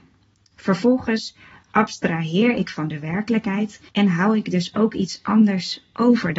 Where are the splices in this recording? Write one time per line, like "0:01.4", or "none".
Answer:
0:03.9